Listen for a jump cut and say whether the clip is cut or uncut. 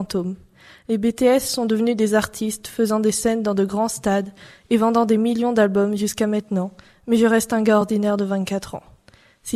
uncut